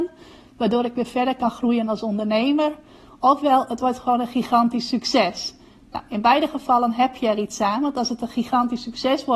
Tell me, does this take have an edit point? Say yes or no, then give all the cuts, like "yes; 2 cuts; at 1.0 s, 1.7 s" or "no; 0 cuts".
no; 0 cuts